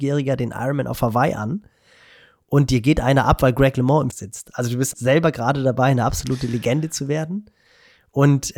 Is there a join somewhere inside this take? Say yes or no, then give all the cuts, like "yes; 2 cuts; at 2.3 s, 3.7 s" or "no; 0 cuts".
yes; 2 cuts; at 4.1 s, 4.9 s